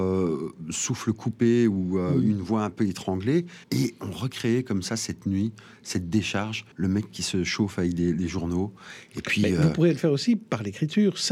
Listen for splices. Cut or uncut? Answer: cut